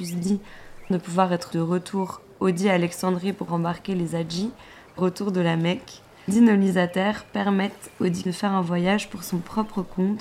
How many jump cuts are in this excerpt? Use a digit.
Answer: 6